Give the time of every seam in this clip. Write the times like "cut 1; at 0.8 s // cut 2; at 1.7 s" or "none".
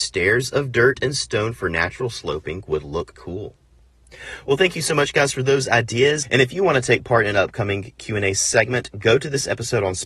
cut 1; at 3.1 s